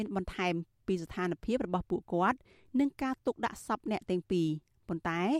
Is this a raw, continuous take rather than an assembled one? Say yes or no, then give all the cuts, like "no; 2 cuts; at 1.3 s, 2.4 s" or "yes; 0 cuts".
yes; 0 cuts